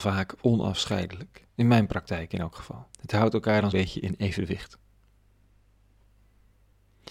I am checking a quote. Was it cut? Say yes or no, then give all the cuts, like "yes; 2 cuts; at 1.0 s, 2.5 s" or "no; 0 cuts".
yes; 3 cuts; at 1.5 s, 2.9 s, 3.7 s